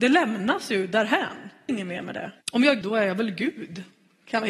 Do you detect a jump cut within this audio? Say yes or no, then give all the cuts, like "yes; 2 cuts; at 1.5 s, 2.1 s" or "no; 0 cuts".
yes; 3 cuts; at 1.7 s, 2.4 s, 2.8 s